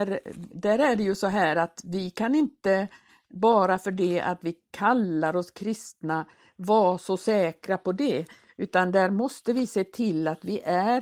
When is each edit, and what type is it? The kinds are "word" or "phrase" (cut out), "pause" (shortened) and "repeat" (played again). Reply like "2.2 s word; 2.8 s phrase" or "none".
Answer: none